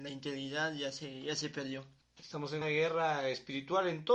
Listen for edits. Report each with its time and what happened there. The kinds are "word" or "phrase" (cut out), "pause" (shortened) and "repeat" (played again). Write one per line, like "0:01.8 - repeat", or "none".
0:02.0 - pause
0:02.6 - word